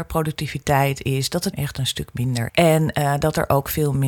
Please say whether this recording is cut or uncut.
cut